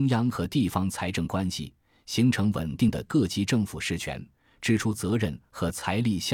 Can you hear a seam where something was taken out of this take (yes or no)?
no